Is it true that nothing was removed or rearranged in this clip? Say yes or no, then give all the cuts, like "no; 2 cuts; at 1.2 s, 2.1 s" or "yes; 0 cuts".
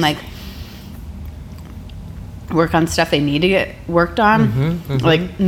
yes; 0 cuts